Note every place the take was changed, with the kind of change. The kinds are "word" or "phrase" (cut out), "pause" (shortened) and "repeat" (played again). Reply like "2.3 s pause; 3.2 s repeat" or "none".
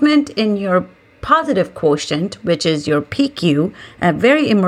none